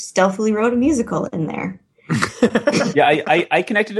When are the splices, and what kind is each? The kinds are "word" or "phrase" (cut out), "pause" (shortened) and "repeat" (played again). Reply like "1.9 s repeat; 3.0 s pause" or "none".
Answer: none